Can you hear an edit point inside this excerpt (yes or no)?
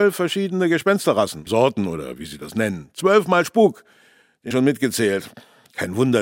yes